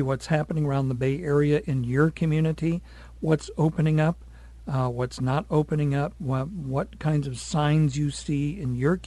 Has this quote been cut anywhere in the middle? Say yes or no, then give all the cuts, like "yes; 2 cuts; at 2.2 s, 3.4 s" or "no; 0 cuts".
no; 0 cuts